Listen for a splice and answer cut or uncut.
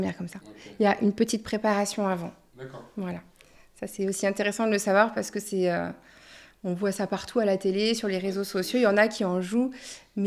uncut